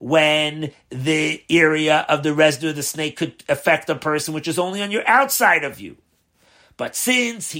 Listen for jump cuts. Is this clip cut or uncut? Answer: uncut